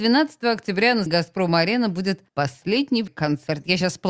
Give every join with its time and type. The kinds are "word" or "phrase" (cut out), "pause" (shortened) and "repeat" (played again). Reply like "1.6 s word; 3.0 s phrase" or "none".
1.1 s word; 2.3 s pause; 3.1 s word